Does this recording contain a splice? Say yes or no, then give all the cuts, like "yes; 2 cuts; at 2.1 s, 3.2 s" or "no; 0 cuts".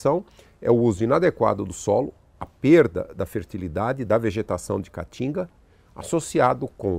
no; 0 cuts